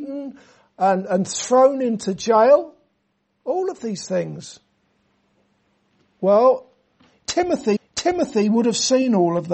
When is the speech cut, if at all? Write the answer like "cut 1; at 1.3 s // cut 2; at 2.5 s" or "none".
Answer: cut 1; at 7.8 s